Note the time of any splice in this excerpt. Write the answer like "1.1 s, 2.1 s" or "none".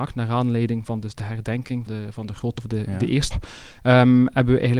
1.9 s, 2.6 s, 3.3 s